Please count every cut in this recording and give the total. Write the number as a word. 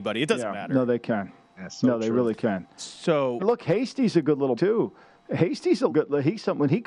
three